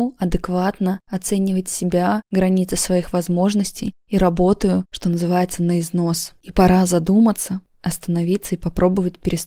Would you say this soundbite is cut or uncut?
uncut